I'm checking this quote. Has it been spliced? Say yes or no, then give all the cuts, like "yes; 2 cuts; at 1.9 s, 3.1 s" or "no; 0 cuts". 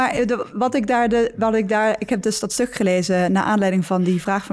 no; 0 cuts